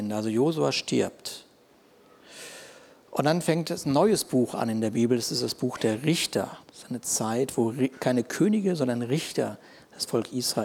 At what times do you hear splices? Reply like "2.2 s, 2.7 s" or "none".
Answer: 6.6 s